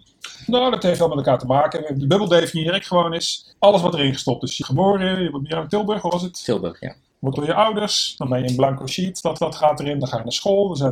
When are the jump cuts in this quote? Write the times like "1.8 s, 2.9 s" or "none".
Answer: 3.5 s, 4.6 s, 7.3 s, 9.4 s